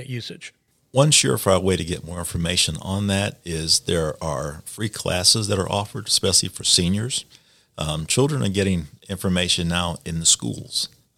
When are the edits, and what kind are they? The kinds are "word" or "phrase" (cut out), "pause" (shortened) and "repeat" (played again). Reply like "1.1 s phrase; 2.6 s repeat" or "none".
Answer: none